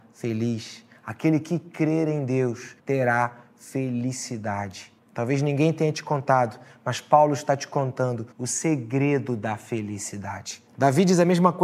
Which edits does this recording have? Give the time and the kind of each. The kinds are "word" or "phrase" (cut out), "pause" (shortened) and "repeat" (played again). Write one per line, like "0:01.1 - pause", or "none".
0:02.8 - pause
0:05.0 - pause
0:08.3 - pause
0:10.7 - pause